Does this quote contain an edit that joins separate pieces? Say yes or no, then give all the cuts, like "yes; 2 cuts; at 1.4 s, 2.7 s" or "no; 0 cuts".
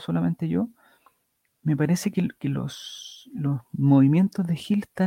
no; 0 cuts